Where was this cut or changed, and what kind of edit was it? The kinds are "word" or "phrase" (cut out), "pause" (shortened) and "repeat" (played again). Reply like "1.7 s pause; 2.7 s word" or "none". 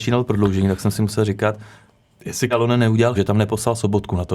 2.5 s word; 3.2 s word